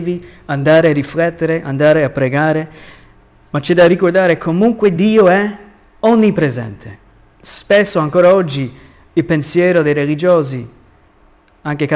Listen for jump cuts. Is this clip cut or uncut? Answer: uncut